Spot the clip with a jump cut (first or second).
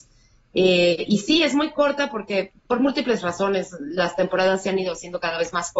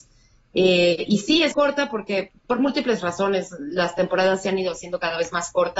second